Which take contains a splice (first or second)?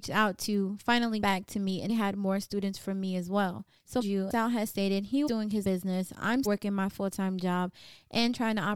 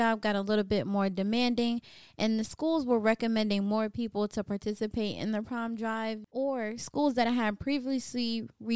first